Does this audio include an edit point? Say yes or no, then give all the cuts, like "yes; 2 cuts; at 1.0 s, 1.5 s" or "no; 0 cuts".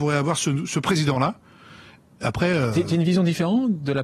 no; 0 cuts